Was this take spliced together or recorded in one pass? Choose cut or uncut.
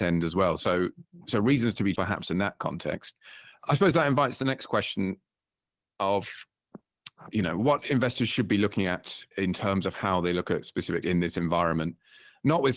cut